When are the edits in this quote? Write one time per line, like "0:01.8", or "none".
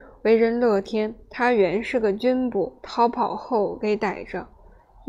0:01.2
0:02.8